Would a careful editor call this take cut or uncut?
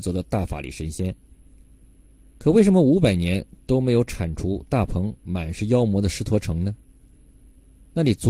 uncut